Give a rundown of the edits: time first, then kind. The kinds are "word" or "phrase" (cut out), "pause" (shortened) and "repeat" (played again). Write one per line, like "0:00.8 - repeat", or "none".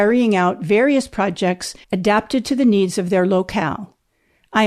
0:01.8 - pause